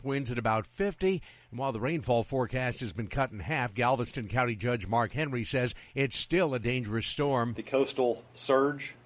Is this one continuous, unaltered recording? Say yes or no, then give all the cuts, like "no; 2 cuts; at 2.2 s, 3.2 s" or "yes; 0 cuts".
yes; 0 cuts